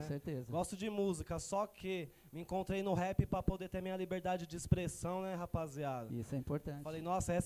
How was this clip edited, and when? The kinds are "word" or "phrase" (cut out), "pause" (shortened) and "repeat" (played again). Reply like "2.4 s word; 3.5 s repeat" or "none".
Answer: none